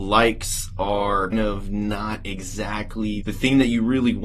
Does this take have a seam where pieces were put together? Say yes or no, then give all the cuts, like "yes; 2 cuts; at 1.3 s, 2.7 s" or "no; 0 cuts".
yes; 2 cuts; at 1.3 s, 3.2 s